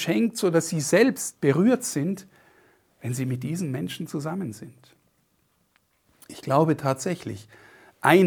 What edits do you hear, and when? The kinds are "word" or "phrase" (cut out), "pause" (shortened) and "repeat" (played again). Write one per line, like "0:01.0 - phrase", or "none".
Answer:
none